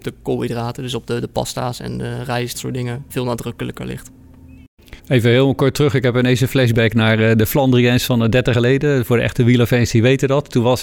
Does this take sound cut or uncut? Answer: cut